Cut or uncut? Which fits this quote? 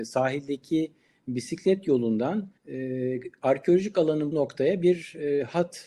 cut